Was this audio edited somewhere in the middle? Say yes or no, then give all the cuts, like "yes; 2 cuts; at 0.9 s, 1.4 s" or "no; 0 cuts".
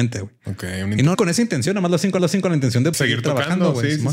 yes; 3 cuts; at 1.1 s, 2.2 s, 2.9 s